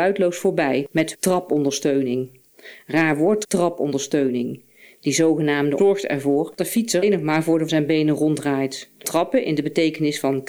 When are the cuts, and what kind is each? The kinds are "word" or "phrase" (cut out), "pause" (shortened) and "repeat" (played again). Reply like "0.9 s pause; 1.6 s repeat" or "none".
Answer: 1.1 s word; 3.4 s word; 5.8 s word; 6.6 s word; 7.0 s word; 7.7 s word; 9.0 s word